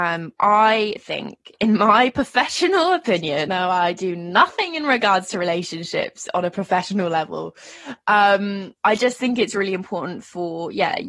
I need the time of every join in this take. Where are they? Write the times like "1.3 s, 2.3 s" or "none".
3.5 s, 8.8 s